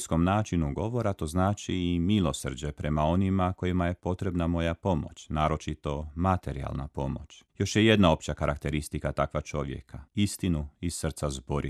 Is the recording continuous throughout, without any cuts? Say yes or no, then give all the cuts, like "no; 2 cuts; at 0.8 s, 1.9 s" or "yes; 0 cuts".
no; 2 cuts; at 7.5 s, 10.1 s